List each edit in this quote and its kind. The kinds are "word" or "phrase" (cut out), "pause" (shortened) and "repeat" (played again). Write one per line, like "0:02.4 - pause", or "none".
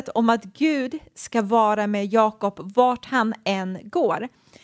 none